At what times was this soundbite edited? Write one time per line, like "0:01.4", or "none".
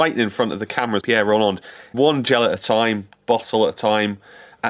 0:01.0
0:01.9